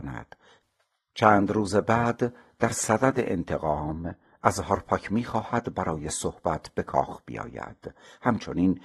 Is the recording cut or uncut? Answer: uncut